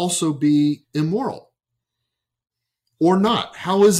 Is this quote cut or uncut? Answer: uncut